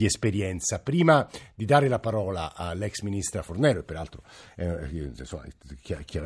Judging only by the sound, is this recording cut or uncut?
uncut